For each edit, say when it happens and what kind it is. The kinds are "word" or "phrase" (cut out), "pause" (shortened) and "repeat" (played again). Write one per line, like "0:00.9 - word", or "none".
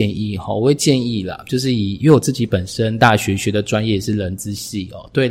none